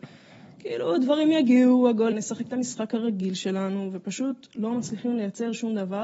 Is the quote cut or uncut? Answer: cut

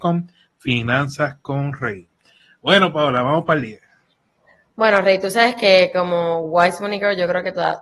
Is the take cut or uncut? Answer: uncut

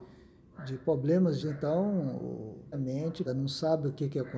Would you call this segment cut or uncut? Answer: cut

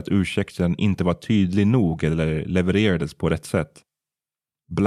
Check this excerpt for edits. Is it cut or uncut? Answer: uncut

